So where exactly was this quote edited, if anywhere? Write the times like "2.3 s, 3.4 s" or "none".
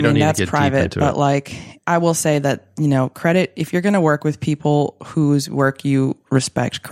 none